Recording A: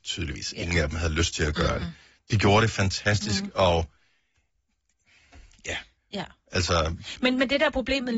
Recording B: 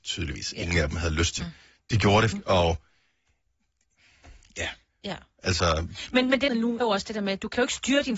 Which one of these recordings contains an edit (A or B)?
B